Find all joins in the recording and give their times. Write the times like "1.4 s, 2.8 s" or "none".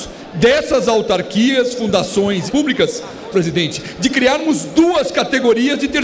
2.5 s, 3.3 s